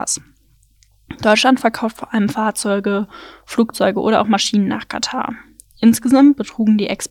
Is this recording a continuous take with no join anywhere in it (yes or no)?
yes